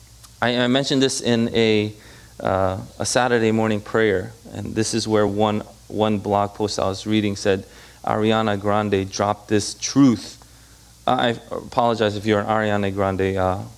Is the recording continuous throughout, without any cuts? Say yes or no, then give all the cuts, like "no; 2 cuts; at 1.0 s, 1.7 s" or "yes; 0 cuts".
yes; 0 cuts